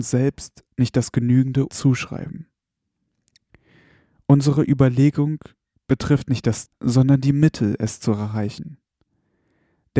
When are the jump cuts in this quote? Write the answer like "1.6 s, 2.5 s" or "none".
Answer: 1.7 s, 6.7 s